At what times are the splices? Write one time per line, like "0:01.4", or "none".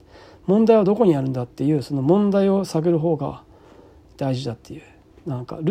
none